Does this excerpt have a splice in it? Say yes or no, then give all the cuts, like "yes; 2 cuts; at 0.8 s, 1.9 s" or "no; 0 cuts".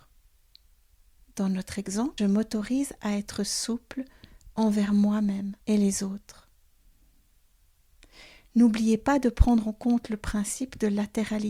yes; 2 cuts; at 2.2 s, 5.6 s